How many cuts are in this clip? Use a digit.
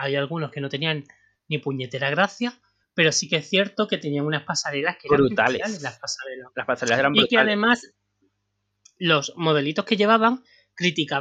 0